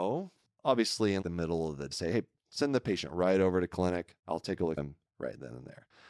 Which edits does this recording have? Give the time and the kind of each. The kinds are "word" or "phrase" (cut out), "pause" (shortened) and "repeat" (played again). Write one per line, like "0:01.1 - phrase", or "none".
0:01.2 - word
0:01.9 - phrase
0:04.8 - word